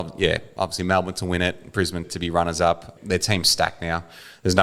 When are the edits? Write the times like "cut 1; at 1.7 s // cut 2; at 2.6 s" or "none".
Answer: cut 1; at 2.0 s // cut 2; at 3.0 s